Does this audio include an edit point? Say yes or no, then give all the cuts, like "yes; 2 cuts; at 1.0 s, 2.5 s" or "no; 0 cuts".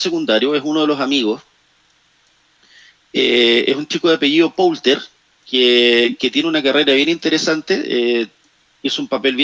no; 0 cuts